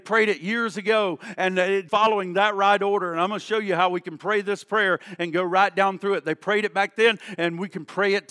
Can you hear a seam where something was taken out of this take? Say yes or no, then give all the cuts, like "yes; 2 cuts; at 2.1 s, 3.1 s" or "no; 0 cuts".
yes; 1 cut; at 1.9 s